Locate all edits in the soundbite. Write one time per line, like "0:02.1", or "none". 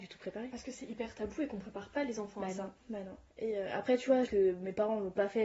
0:03.3
0:04.3